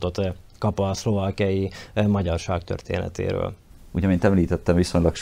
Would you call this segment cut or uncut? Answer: uncut